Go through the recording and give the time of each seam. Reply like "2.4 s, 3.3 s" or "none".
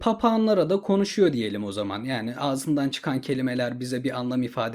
none